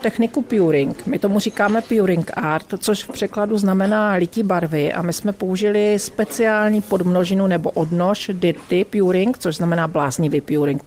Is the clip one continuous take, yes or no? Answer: yes